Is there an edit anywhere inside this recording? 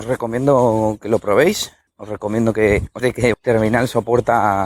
yes; 3 cuts; at 1.9 s, 3.0 s, 3.3 s

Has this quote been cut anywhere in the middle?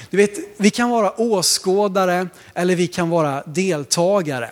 no; 0 cuts

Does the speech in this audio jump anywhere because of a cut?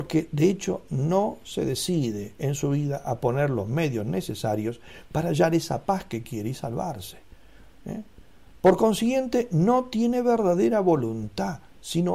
no; 0 cuts

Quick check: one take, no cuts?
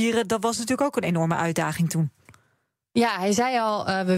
yes; 0 cuts

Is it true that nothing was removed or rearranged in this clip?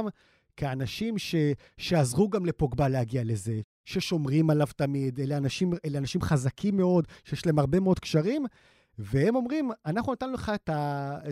yes; 0 cuts

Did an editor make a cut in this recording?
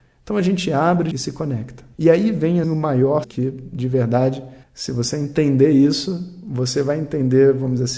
yes; 5 cuts; at 1.1 s, 1.9 s, 2.6 s, 3.2 s, 4.6 s

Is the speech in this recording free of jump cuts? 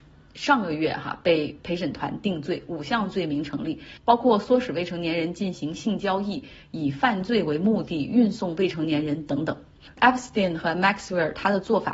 no; 1 cut; at 9.9 s

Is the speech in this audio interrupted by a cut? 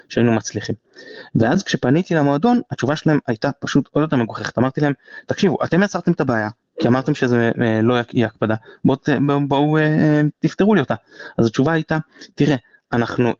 no; 0 cuts

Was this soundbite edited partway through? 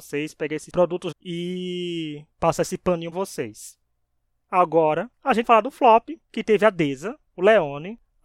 yes; 6 cuts; at 1.1 s, 2.3 s, 3.1 s, 5.4 s, 6.2 s, 7.3 s

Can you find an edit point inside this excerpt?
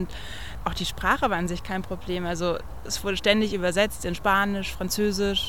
no; 0 cuts

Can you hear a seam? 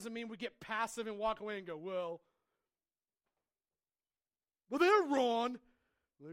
no; 0 cuts

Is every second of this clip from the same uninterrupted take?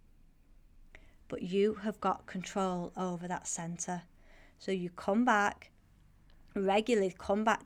yes; 0 cuts

